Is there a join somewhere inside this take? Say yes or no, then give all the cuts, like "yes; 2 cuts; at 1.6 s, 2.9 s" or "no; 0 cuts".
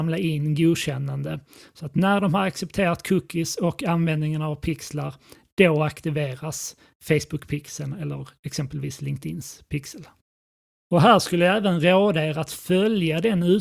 no; 0 cuts